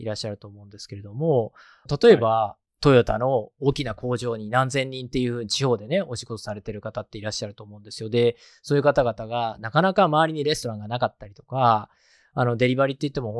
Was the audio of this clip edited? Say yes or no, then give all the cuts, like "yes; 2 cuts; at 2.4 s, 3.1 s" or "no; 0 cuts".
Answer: no; 0 cuts